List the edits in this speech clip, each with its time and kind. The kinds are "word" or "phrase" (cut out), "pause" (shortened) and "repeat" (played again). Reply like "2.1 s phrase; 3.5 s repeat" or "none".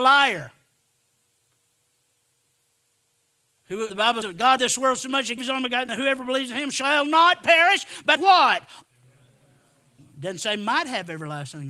3.9 s word; 4.2 s word; 4.6 s word; 5.4 s word; 5.9 s word; 8.2 s word